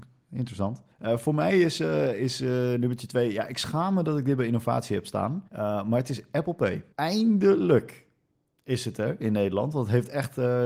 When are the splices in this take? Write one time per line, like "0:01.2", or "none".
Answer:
0:00.9
0:05.5
0:06.9